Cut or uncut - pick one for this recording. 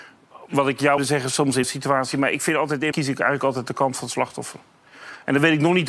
cut